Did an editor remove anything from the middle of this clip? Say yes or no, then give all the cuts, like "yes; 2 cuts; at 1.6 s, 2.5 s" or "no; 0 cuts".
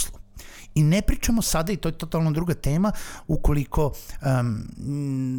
no; 0 cuts